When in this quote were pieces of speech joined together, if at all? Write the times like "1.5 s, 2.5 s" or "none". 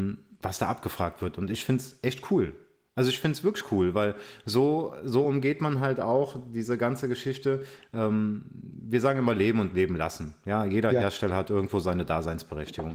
none